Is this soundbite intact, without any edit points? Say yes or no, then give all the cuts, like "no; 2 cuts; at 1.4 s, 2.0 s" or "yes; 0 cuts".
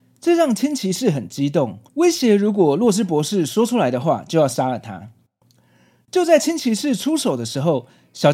no; 1 cut; at 1.9 s